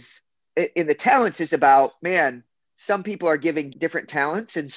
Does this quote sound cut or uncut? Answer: cut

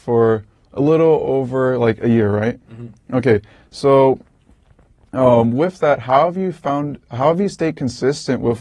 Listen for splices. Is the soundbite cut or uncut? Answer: uncut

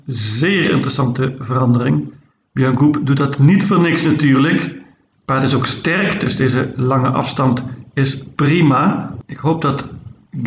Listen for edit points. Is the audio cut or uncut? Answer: uncut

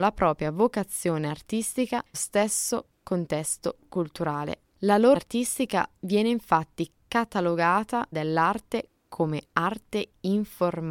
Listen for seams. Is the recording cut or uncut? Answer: cut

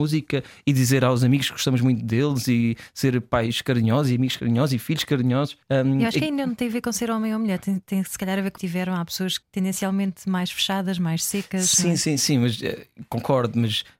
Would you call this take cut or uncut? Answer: cut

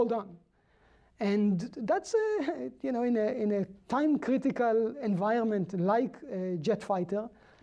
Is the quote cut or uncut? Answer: uncut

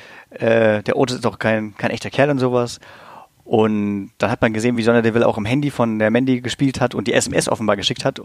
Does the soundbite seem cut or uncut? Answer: uncut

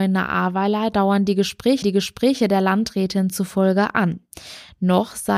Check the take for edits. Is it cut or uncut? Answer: cut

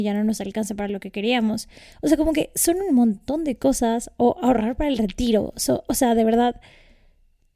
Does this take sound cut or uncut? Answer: uncut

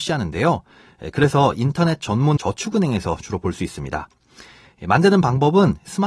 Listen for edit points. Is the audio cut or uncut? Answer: cut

